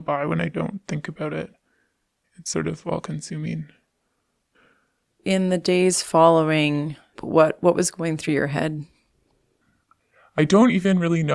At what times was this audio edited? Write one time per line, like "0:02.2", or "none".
none